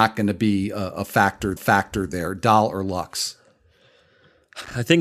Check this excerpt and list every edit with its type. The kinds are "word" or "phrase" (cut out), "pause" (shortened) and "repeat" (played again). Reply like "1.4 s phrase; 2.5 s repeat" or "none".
1.6 s repeat